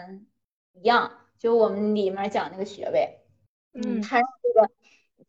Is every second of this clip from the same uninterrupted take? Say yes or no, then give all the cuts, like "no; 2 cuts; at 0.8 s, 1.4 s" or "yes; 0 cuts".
yes; 0 cuts